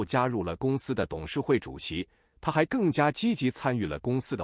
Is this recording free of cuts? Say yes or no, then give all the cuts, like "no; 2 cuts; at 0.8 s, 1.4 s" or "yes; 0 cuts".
yes; 0 cuts